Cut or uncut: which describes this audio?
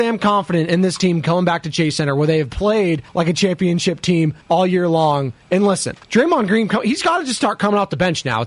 cut